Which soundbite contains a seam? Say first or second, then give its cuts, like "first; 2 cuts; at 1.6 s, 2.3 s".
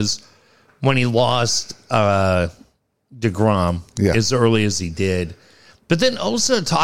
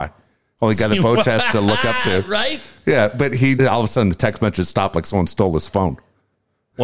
second; 1 cut; at 3.6 s